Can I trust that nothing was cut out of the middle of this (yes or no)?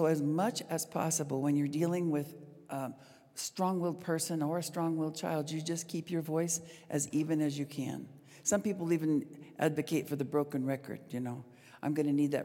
yes